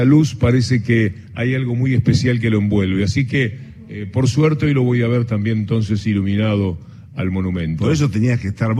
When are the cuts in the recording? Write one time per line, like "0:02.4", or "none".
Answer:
none